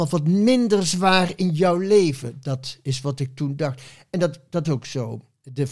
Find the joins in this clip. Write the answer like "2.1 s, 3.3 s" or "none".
4.6 s